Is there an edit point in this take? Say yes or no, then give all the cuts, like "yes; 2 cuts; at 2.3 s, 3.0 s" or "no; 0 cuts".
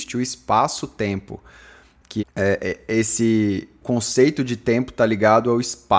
yes; 2 cuts; at 2.2 s, 3.8 s